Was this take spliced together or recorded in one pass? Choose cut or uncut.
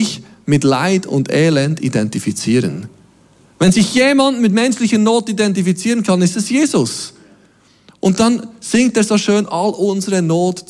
uncut